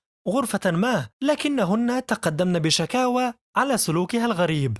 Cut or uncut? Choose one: cut